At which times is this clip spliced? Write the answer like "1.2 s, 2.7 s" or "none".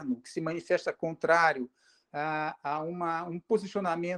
none